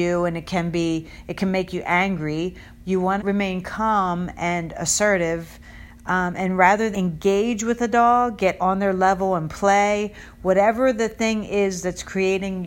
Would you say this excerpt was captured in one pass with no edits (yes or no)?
no